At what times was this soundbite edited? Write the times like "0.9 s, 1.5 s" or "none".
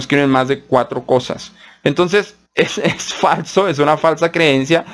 2.4 s